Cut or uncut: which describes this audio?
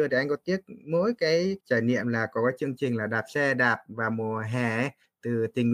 cut